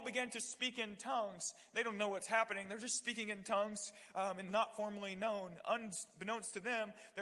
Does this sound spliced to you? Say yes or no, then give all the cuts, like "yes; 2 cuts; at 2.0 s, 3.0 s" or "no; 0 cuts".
yes; 1 cut; at 4.5 s